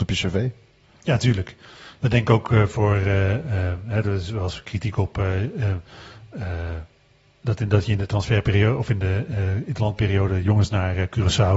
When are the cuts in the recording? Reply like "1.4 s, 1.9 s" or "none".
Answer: none